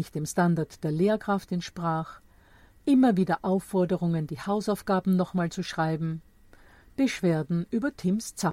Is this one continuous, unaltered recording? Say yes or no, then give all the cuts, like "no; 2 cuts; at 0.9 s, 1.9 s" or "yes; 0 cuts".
yes; 0 cuts